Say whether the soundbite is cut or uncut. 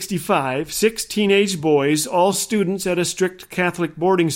uncut